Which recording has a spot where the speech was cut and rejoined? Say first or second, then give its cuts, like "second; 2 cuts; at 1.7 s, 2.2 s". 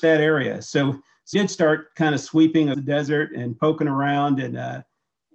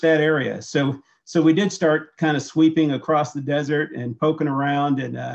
first; 2 cuts; at 1.3 s, 2.7 s